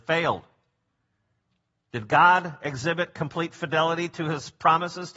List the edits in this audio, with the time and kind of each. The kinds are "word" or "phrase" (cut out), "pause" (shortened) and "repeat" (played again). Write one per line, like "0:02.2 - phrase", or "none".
none